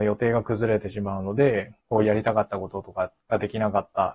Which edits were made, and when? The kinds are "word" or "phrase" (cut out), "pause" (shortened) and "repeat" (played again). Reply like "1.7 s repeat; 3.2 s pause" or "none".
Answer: 1.8 s pause; 3.2 s pause